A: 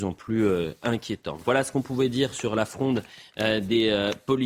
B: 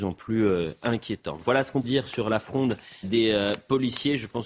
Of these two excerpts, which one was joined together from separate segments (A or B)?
B